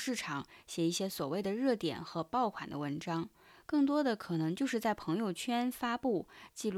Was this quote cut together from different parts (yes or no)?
no